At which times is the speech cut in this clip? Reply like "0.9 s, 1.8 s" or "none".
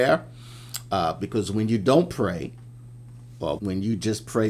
3.6 s